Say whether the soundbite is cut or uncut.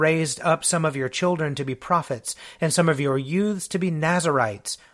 uncut